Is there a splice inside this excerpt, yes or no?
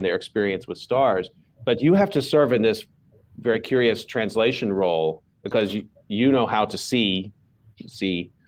no